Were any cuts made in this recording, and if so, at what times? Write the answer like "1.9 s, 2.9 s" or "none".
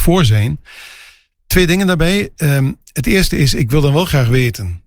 none